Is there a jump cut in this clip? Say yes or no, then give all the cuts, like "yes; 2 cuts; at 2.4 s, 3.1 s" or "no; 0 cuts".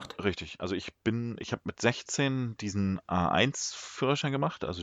no; 0 cuts